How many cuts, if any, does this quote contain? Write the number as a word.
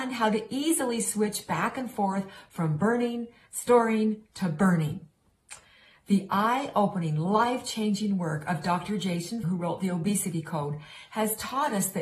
one